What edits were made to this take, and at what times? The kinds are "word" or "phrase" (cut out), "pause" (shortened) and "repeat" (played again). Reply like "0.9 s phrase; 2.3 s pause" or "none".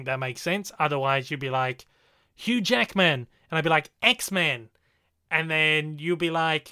none